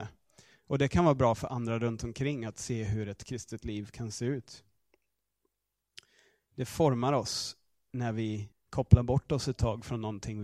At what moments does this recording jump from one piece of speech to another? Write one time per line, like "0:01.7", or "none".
0:08.5